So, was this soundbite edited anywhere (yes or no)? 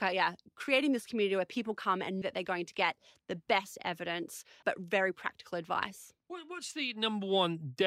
yes